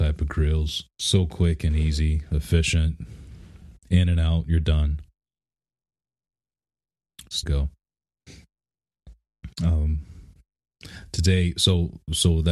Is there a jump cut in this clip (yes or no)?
yes